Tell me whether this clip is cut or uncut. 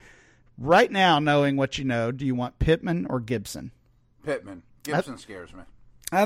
uncut